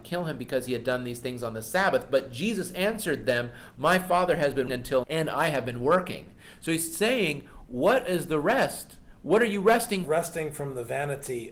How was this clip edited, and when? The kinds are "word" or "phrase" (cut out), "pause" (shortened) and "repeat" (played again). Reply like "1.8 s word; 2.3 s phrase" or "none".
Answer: 4.7 s word; 5.0 s word; 10.0 s phrase